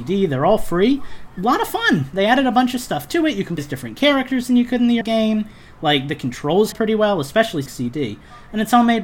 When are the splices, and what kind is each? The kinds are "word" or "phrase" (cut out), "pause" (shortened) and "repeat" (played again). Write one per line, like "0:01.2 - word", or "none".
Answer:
0:03.6 - word
0:05.0 - word
0:06.7 - word
0:07.7 - word